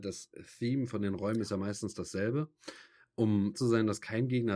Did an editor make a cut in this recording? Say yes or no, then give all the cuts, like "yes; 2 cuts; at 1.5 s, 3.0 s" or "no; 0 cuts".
yes; 1 cut; at 3.5 s